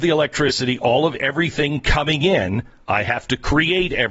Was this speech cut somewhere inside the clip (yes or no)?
no